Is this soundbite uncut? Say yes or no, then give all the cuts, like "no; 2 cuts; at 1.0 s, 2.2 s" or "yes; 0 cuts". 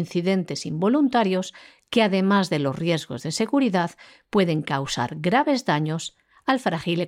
yes; 0 cuts